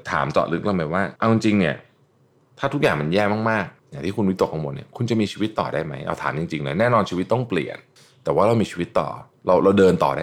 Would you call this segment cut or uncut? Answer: cut